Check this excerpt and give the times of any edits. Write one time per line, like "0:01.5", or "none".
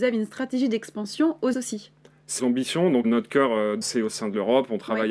0:01.5
0:02.4
0:03.0
0:03.8